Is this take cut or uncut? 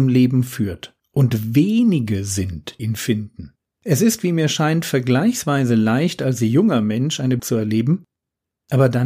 cut